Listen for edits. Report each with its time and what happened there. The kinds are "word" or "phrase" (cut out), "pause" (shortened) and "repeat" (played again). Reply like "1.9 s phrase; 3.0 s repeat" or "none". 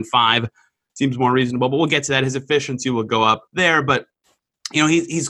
3.5 s pause

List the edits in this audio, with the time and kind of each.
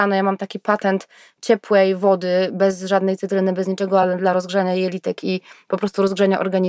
none

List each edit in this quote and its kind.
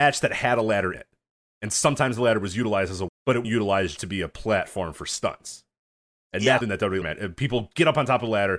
0.9 s word; 3.1 s word; 3.4 s word; 4.0 s word; 6.6 s word; 7.0 s word

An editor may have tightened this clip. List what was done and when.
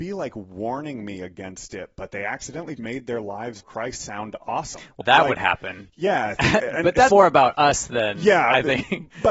2.8 s word; 3.6 s word; 5.0 s word; 7.1 s word

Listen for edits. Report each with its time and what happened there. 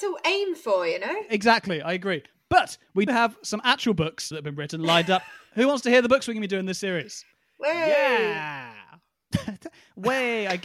3.1 s word; 4.3 s word; 5.5 s word; 7.3 s pause

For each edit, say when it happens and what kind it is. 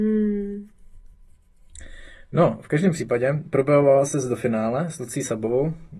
none

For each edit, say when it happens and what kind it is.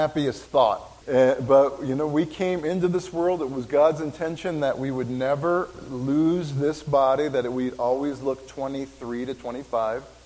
1.0 s pause

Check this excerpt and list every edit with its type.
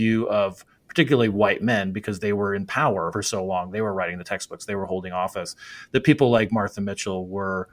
3.1 s phrase

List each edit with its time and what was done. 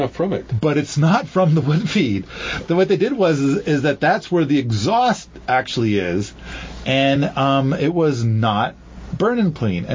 none

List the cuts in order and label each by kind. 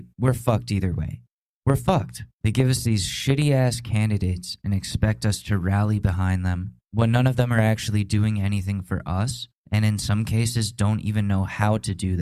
1.3 s pause; 2.3 s pause; 6.8 s pause; 9.6 s pause

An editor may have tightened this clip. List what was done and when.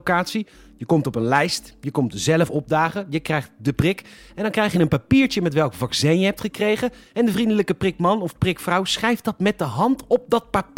none

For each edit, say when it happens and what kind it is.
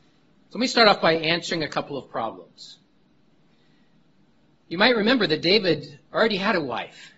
none

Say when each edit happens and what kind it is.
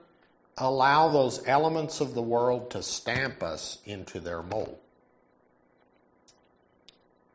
none

